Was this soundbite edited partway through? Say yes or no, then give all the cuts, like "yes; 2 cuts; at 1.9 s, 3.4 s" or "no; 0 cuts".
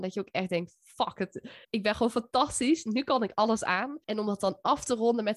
yes; 2 cuts; at 1.6 s, 4.0 s